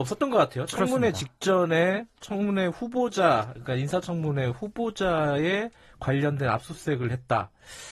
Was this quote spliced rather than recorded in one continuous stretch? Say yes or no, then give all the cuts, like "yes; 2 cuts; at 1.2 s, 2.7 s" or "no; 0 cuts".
no; 0 cuts